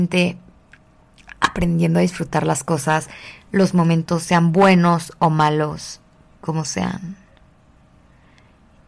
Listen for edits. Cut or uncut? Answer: uncut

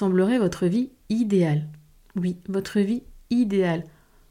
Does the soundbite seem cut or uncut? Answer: uncut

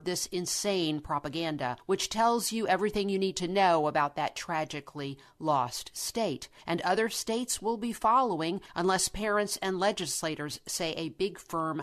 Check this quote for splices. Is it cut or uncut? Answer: uncut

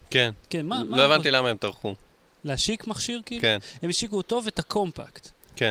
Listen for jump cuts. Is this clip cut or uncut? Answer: uncut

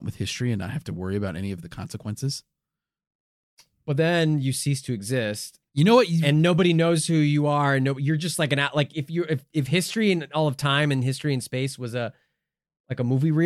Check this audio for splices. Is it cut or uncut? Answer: cut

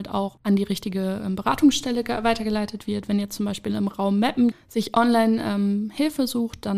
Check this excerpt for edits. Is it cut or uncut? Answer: cut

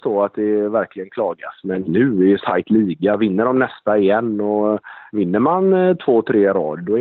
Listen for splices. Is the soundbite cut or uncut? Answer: cut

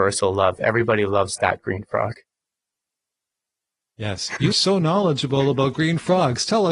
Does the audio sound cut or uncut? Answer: cut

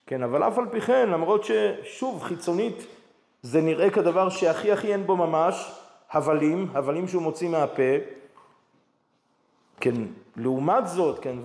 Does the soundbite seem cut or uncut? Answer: uncut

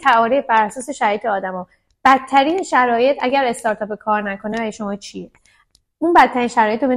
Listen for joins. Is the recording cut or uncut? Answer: uncut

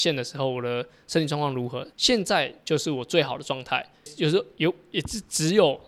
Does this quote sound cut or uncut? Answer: cut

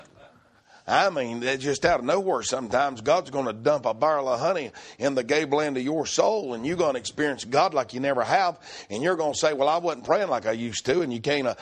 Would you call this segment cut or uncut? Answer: uncut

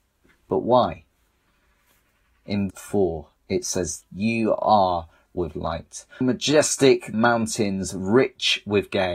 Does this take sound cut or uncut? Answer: cut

